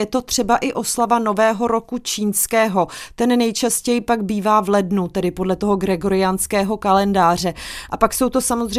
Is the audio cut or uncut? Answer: uncut